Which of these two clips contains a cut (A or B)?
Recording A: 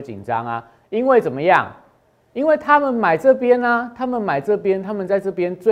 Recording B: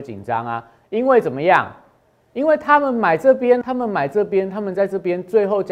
B